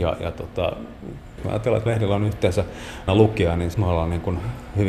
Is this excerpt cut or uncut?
cut